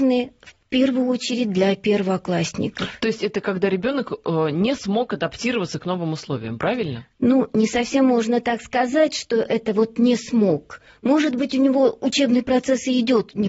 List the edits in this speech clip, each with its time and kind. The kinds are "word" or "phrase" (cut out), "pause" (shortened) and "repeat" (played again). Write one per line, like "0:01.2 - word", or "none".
none